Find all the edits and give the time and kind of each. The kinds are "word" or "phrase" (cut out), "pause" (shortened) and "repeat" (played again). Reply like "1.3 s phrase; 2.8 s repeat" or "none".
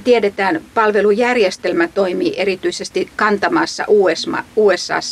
none